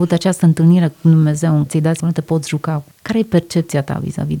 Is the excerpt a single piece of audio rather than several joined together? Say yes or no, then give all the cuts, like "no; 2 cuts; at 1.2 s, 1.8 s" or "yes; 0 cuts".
no; 3 cuts; at 1.7 s, 2.0 s, 2.9 s